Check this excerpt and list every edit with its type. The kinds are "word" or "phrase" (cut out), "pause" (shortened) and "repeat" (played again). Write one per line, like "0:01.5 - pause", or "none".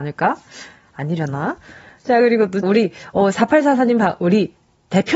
0:02.6 - word